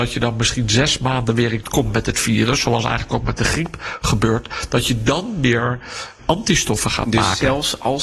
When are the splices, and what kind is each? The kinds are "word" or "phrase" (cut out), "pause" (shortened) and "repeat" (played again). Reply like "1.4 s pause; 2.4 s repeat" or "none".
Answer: 1.6 s word; 6.2 s word